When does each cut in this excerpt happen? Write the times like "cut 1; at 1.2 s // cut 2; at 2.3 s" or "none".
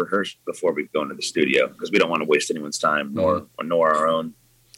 none